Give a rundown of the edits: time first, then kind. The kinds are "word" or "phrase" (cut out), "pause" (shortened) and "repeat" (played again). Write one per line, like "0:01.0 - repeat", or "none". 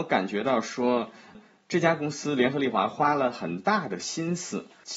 none